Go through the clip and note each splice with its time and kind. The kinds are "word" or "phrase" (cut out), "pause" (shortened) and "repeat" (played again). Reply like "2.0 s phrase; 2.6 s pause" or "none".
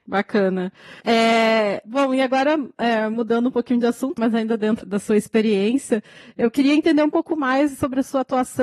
1.0 s pause; 4.2 s word; 4.8 s word